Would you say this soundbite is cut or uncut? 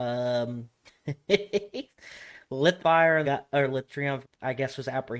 cut